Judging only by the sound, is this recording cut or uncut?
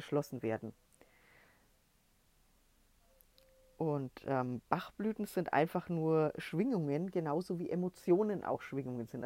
uncut